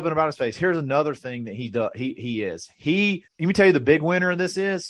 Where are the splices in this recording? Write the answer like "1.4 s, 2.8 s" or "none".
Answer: 3.3 s